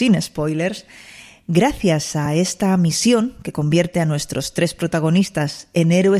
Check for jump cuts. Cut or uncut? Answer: uncut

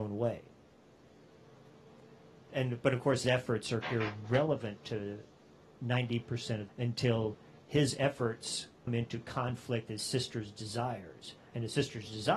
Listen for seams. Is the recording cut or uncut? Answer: cut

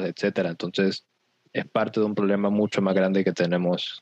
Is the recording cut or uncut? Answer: uncut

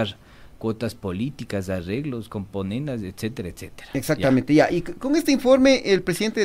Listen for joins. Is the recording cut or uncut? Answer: uncut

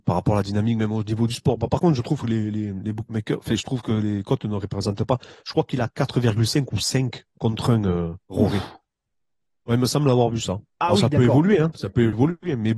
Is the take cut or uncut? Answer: cut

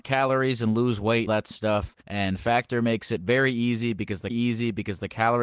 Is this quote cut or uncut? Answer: cut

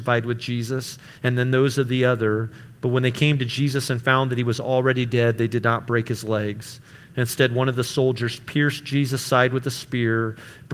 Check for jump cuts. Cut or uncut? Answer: cut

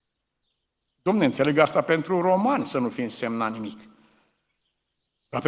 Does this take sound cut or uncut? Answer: uncut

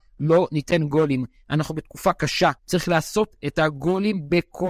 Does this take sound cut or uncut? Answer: cut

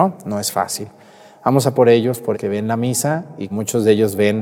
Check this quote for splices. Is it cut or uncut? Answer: cut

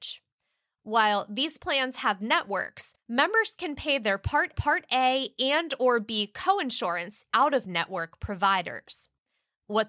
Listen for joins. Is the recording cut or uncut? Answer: cut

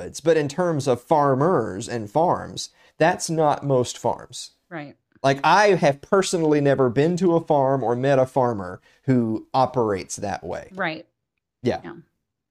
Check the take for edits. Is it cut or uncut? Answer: uncut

